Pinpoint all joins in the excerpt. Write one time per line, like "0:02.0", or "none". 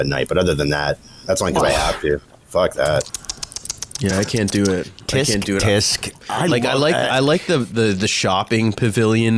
none